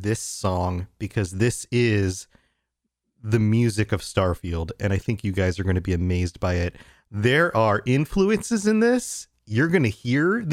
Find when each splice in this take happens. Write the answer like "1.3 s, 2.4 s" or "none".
none